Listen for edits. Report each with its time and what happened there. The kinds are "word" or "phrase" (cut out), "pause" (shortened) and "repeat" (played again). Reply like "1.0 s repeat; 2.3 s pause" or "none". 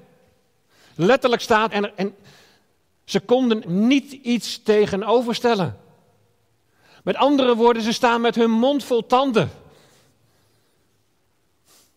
1.7 s word; 3.6 s word